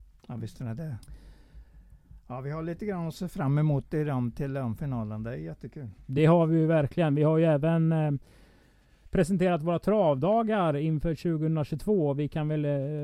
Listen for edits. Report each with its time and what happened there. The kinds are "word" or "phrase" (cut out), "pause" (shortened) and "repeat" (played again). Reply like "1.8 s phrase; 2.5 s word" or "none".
none